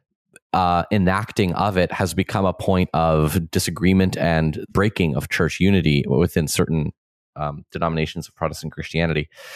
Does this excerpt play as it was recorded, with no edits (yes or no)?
no